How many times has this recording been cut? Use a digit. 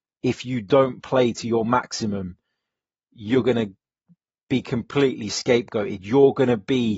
0